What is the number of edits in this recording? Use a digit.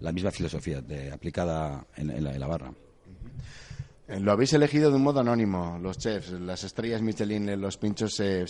1